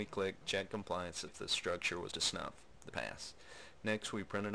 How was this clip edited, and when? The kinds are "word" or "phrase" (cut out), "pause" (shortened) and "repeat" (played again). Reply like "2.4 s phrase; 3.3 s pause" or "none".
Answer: 1.3 s word; 2.1 s word; 2.9 s word